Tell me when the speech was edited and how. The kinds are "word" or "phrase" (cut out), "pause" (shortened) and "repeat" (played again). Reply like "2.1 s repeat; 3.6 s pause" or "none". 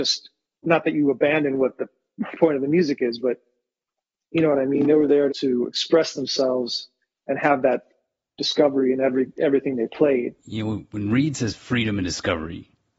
5.3 s word; 10.4 s pause